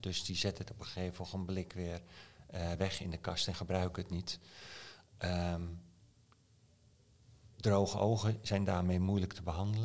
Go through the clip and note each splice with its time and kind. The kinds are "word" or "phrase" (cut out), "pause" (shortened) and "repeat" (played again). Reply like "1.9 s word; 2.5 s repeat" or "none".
none